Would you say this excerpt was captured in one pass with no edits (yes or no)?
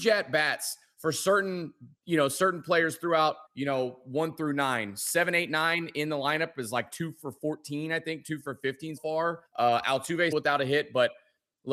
no